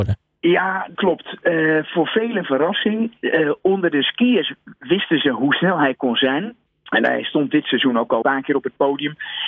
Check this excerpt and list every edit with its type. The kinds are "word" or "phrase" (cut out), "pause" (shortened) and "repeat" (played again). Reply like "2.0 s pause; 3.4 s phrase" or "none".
0.9 s word; 6.7 s pause; 8.2 s phrase